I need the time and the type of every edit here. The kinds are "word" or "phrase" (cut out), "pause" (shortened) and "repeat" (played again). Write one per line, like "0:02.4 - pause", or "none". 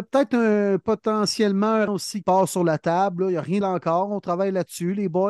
0:01.9 - word
0:02.2 - word
0:03.6 - word